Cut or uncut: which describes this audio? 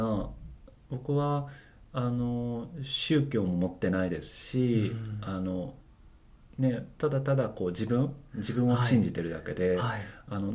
uncut